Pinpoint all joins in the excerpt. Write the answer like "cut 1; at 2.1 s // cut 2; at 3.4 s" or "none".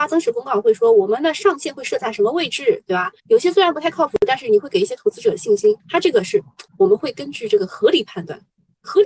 cut 1; at 3.2 s // cut 2; at 5.8 s // cut 3; at 6.7 s